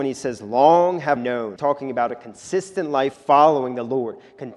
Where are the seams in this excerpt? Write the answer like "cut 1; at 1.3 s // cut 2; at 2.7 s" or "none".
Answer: cut 1; at 1.2 s // cut 2; at 1.6 s // cut 3; at 3.1 s